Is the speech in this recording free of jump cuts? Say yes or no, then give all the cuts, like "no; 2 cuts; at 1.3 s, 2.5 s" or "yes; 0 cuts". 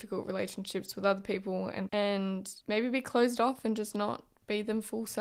no; 1 cut; at 1.9 s